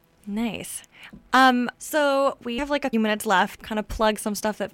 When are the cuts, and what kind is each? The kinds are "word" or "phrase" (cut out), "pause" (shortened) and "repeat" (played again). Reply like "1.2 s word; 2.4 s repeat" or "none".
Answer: 1.7 s pause; 2.6 s word; 2.9 s word; 3.6 s phrase